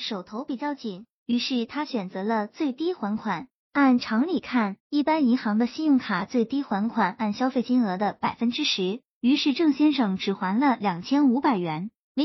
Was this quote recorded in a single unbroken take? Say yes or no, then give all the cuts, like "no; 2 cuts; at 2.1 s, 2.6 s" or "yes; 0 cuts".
no; 1 cut; at 4.8 s